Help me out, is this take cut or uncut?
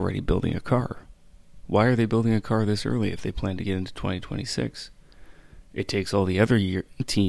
uncut